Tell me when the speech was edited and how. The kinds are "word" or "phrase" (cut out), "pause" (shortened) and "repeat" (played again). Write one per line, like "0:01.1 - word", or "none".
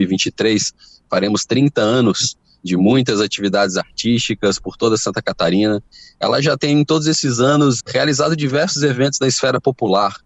0:07.8 - word